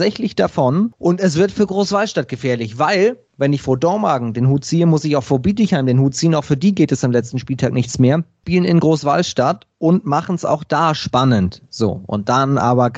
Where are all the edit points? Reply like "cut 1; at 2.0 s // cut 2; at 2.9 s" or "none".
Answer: none